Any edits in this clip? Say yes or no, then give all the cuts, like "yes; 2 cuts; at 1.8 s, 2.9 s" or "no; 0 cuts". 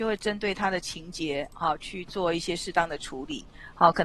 no; 0 cuts